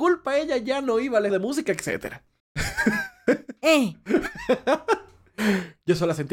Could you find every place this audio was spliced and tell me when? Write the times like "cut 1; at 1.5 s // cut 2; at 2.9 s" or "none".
cut 1; at 1.3 s